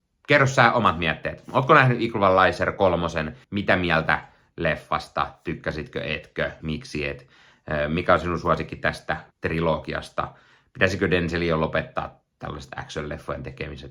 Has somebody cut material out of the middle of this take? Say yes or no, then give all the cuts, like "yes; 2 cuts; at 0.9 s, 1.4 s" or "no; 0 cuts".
yes; 3 cuts; at 3.4 s, 6.6 s, 9.3 s